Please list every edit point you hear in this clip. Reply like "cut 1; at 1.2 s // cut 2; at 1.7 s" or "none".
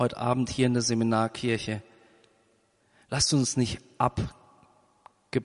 none